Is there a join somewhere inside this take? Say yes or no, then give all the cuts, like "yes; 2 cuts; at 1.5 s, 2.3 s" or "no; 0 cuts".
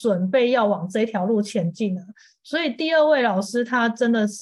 no; 0 cuts